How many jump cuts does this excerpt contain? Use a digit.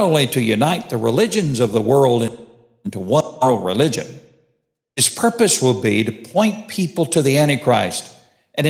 0